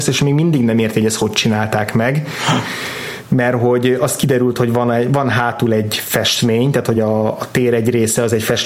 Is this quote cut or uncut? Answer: uncut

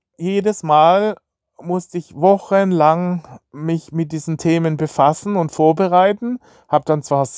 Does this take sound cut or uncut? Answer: uncut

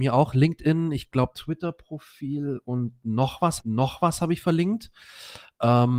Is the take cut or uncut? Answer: cut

